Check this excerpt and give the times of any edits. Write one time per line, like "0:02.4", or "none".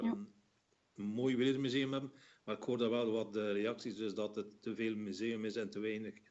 none